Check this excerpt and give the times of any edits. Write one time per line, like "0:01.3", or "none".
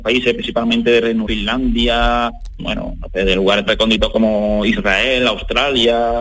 0:01.3
0:02.6
0:03.7
0:04.1

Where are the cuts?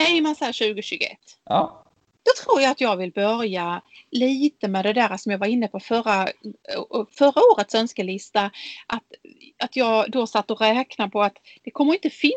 none

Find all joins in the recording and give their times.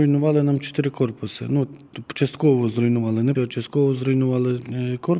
0:03.3

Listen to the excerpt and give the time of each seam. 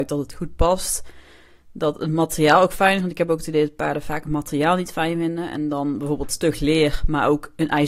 none

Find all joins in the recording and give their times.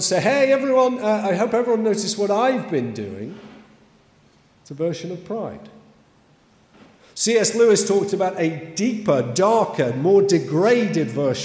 none

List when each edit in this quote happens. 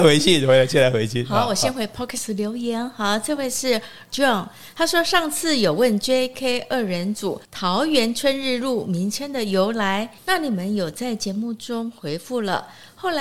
0:04.1
0:07.4
0:10.2

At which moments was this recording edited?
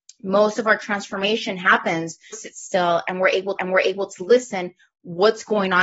0:02.3
0:03.6

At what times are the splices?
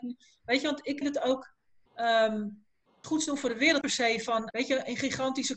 0:01.0
0:03.0
0:03.8
0:04.5

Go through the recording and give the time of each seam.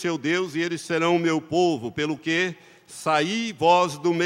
none

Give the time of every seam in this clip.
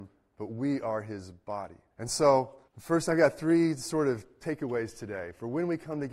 0:01.9
0:02.7

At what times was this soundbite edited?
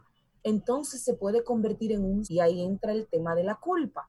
0:02.2

